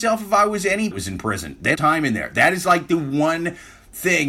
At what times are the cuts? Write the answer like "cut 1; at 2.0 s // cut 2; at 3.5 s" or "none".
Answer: cut 1; at 0.9 s // cut 2; at 1.8 s